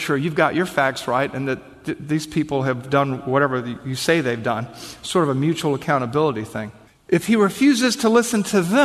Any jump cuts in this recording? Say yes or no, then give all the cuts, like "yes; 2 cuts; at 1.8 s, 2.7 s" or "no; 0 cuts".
no; 0 cuts